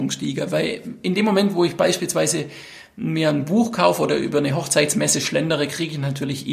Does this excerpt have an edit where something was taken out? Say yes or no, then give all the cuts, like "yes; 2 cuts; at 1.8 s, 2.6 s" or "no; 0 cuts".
no; 0 cuts